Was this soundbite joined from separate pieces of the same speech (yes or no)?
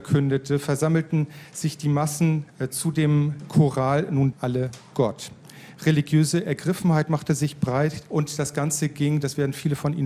yes